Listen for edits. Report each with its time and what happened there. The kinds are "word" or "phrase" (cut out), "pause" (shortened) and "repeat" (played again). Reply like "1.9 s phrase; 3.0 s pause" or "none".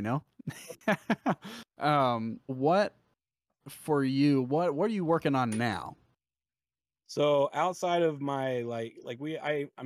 2.5 s word